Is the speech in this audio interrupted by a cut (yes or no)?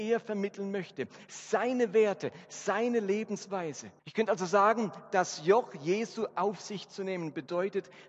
yes